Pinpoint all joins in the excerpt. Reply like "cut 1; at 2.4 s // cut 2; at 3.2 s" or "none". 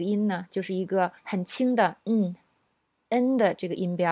cut 1; at 1.2 s // cut 2; at 2.0 s

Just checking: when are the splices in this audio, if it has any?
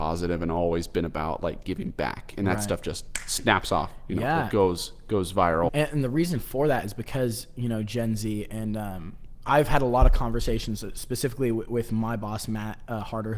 cut 1; at 5.7 s

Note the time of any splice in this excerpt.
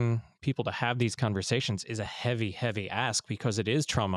none

